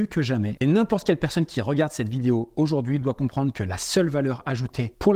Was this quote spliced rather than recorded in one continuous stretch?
no; 0 cuts

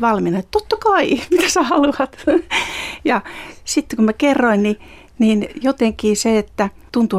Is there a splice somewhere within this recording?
no; 0 cuts

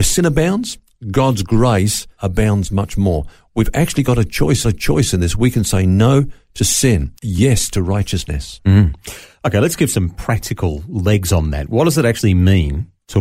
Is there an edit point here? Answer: yes; 2 cuts; at 4.6 s, 7.2 s

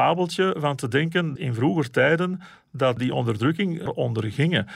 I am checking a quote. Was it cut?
yes; 3 cuts; at 1.4 s, 3.0 s, 3.9 s

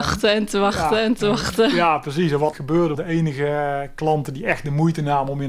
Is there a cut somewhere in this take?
yes; 2 cuts; at 2.5 s, 2.9 s

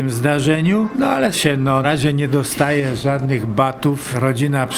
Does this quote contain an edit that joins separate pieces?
yes; 2 cuts; at 1.3 s, 1.8 s

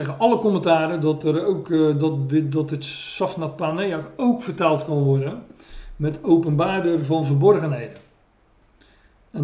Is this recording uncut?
yes; 0 cuts

